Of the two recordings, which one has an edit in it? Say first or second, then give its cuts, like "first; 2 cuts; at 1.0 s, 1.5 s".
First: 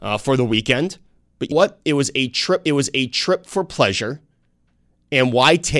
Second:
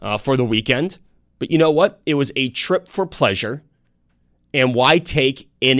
first; 2 cuts; at 1.5 s, 2.7 s